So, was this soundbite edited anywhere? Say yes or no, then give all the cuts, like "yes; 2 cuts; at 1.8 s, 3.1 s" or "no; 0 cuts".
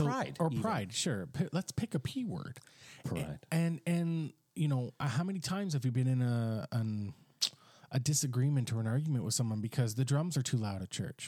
no; 0 cuts